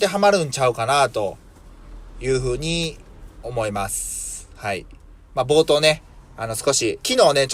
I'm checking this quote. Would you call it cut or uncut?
uncut